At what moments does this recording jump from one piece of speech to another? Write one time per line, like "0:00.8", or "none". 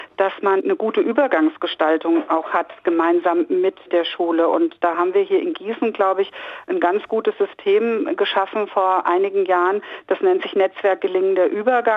none